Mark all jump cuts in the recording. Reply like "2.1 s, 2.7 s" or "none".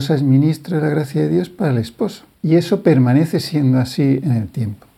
2.3 s